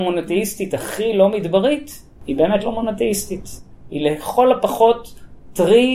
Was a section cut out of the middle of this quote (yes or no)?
no